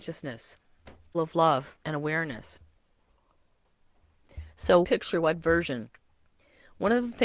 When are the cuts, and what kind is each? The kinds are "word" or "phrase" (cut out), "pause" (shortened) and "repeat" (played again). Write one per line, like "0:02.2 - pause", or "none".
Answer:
0:01.1 - word
0:01.8 - pause
0:04.8 - phrase